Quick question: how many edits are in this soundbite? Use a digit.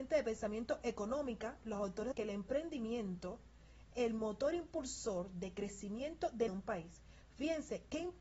3